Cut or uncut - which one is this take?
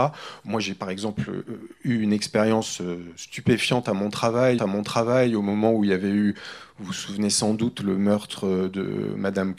cut